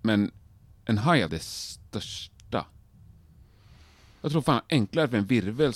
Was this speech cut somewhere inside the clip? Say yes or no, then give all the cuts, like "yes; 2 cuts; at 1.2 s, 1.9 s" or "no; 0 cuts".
yes; 1 cut; at 1.3 s